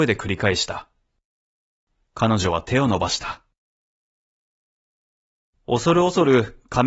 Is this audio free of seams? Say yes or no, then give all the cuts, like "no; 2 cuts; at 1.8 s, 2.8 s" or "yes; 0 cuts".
yes; 0 cuts